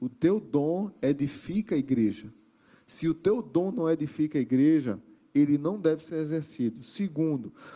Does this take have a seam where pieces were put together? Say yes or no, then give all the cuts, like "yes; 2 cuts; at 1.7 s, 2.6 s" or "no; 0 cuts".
no; 0 cuts